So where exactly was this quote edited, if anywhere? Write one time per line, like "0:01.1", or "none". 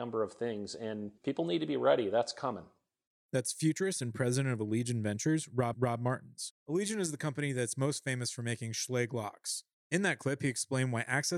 0:01.2
0:05.7

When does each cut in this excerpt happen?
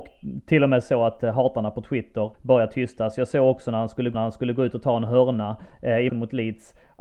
0:02.3
0:04.1
0:06.1

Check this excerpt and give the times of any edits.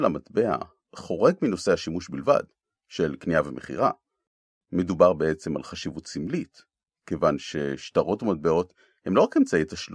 none

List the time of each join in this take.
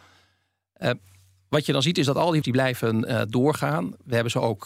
0:02.4

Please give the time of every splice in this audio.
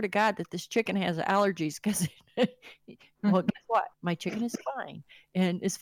0:03.9

